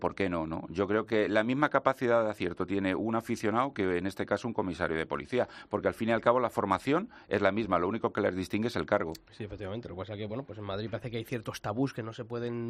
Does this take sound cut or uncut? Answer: uncut